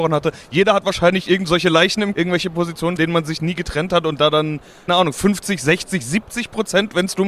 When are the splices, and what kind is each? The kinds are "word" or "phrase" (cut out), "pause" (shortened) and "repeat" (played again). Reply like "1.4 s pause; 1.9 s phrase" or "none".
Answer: 2.1 s word; 3.0 s word; 4.9 s word

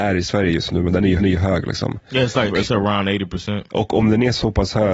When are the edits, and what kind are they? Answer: 1.2 s repeat; 2.5 s word; 3.7 s pause

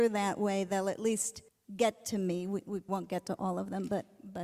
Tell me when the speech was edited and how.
1.5 s pause; 2.9 s word

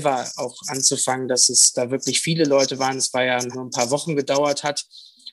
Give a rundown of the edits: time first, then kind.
3.5 s phrase

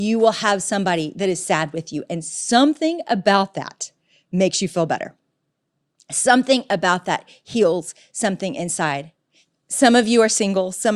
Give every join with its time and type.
none

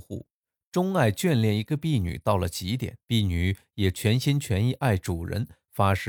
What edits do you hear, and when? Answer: 3.0 s pause

